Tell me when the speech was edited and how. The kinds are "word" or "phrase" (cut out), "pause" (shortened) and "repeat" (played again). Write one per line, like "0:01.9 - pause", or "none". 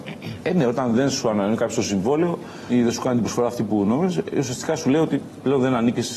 none